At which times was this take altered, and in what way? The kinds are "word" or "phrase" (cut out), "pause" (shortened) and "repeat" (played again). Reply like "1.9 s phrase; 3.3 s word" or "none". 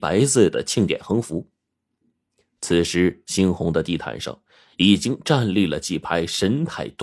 none